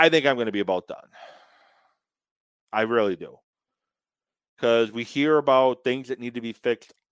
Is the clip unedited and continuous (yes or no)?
yes